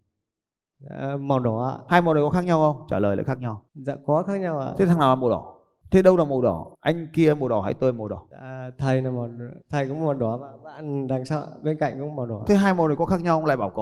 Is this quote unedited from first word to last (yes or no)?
no